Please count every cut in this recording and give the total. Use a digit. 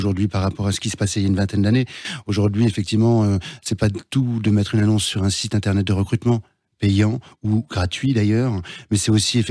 0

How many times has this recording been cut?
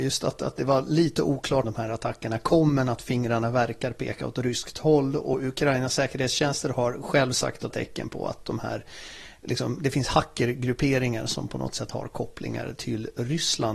2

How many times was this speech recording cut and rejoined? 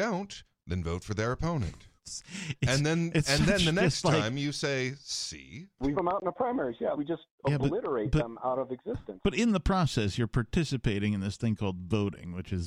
3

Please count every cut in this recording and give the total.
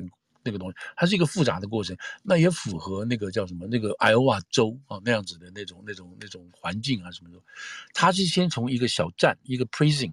0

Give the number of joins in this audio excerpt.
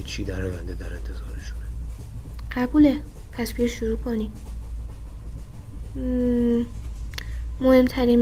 0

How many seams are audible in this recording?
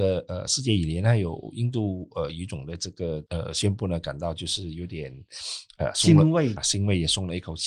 2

